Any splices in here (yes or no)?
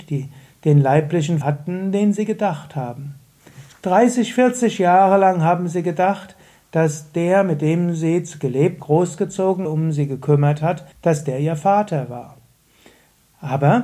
yes